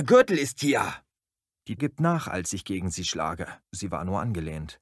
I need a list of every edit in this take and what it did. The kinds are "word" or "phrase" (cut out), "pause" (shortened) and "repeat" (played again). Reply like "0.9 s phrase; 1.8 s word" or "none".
1.8 s word; 3.6 s pause

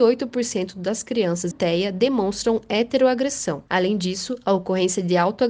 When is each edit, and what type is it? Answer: 1.5 s phrase; 3.7 s pause

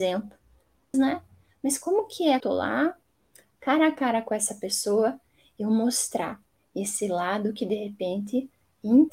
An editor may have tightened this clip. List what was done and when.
0.9 s phrase; 2.4 s phrase

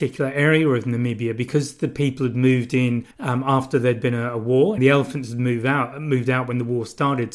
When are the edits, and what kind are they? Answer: 3.1 s pause; 4.8 s phrase

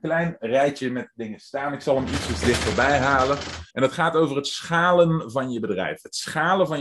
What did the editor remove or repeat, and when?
3.7 s pause

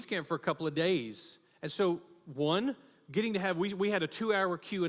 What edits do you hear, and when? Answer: none

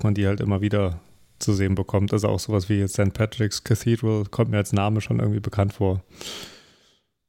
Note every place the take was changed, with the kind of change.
none

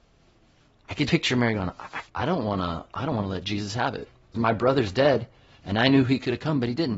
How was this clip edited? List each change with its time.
1.1 s word; 2.0 s word; 4.3 s word

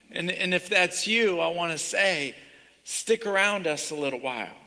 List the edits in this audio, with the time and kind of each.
none

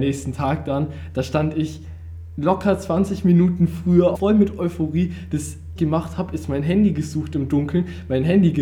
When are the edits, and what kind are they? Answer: 4.1 s word; 5.8 s phrase

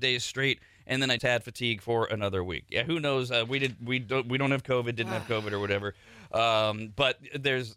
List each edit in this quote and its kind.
1.2 s word

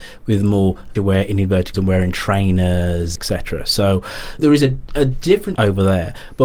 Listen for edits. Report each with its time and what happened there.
1.0 s word; 1.7 s word; 3.2 s word; 4.4 s word; 5.6 s word

